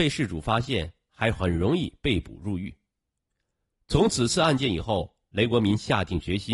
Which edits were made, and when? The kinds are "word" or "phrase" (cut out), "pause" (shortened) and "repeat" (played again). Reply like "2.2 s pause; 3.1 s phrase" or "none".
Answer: none